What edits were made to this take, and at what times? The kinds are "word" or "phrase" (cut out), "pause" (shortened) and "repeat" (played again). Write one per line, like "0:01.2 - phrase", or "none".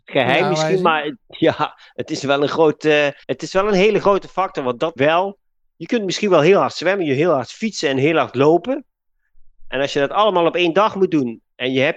0:03.2 - pause
0:05.0 - word